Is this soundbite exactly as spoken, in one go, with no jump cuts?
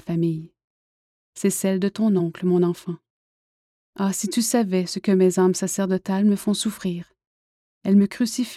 yes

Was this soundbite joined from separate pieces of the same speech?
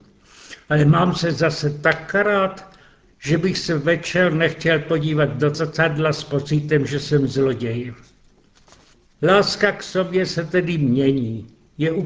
no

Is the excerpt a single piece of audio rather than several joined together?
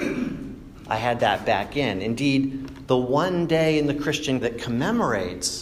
no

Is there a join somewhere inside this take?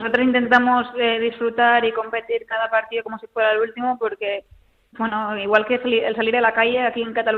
no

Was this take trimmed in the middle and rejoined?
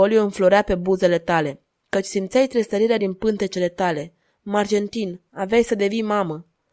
no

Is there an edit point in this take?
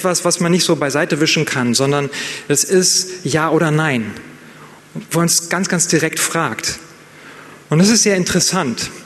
yes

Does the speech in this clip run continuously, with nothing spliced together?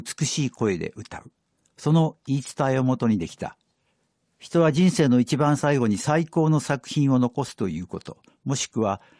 yes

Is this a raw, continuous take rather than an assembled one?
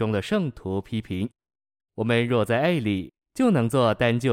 yes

